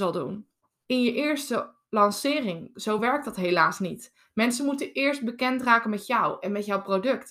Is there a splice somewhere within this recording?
no; 0 cuts

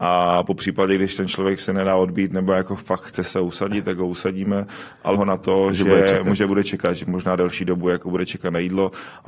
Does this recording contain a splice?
yes; 1 cut; at 5.1 s

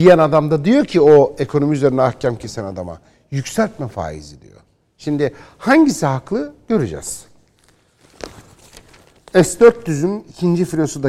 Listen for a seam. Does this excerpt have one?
no; 0 cuts

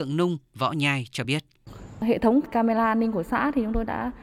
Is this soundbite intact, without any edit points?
yes; 0 cuts

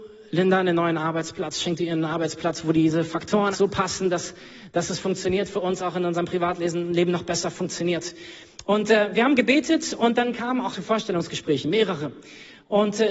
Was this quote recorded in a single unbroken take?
no; 2 cuts; at 3.5 s, 10.7 s

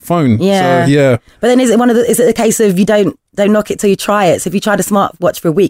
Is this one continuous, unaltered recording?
yes; 0 cuts

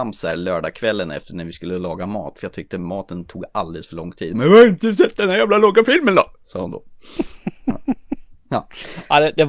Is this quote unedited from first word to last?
yes; 0 cuts

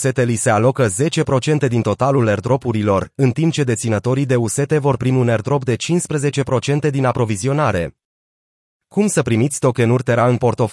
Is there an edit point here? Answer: no; 0 cuts

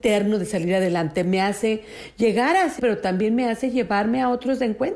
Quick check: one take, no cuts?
no; 1 cut; at 2.8 s

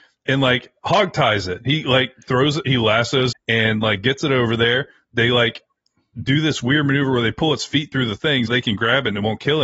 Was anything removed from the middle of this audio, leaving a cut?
yes; 2 cuts; at 3.3 s, 8.5 s

